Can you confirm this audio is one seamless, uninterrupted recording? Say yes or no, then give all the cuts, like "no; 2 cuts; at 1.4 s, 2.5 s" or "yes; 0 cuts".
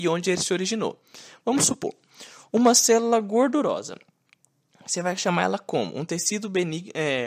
yes; 0 cuts